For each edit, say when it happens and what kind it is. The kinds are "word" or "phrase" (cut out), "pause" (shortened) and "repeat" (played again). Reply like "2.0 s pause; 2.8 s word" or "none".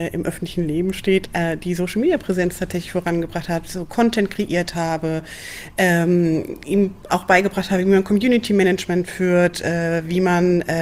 none